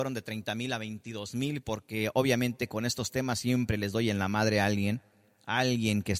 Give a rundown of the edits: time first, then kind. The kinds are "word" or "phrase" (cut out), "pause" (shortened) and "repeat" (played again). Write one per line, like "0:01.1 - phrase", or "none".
none